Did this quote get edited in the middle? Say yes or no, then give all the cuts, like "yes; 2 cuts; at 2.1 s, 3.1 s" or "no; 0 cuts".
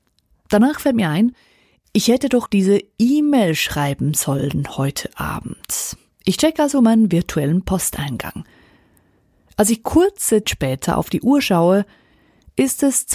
yes; 2 cuts; at 2.5 s, 10.4 s